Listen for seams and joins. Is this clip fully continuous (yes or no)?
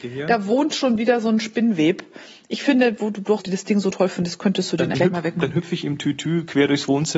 no